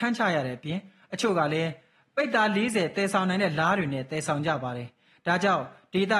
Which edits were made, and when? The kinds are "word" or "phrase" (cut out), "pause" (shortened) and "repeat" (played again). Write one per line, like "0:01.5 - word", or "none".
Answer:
none